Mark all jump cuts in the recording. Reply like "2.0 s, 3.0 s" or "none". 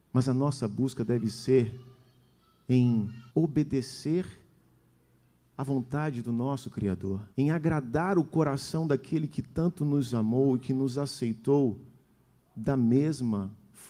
3.3 s, 7.3 s